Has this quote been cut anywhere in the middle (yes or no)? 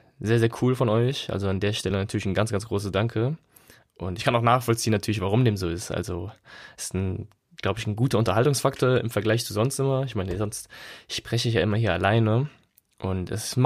no